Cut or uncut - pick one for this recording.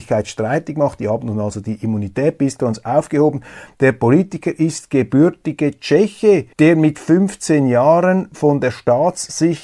cut